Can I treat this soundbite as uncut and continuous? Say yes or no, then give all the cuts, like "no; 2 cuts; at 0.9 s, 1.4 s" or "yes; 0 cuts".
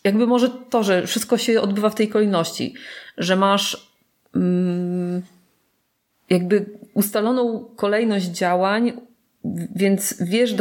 yes; 0 cuts